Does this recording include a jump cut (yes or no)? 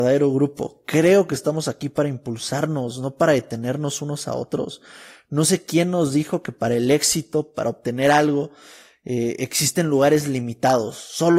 no